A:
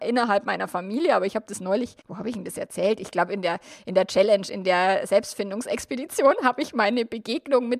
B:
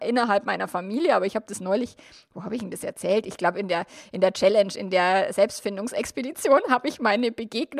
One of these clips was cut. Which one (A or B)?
A